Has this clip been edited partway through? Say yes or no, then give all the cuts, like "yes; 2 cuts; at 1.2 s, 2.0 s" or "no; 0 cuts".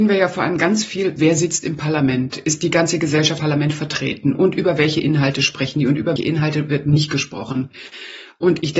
yes; 2 cuts; at 3.4 s, 6.2 s